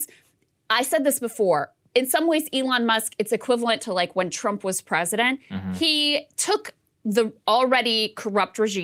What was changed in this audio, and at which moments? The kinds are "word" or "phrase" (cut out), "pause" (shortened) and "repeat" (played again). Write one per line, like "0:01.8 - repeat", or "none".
none